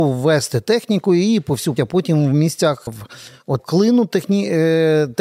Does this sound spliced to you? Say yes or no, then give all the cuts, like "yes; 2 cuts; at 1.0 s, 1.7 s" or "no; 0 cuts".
yes; 3 cuts; at 1.8 s, 2.9 s, 3.6 s